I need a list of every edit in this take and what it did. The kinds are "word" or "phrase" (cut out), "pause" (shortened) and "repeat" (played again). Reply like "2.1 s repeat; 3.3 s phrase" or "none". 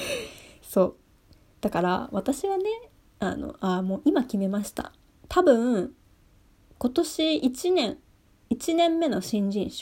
none